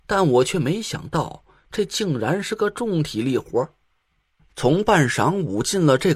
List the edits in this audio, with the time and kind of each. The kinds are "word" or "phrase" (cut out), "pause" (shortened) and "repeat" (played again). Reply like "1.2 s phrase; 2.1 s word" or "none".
none